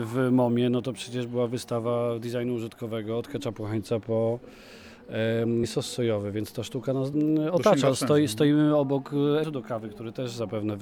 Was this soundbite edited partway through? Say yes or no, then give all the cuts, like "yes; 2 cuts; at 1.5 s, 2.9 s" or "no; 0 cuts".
yes; 3 cuts; at 5.6 s, 7.1 s, 9.4 s